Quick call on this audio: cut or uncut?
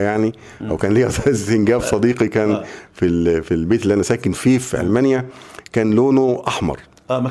uncut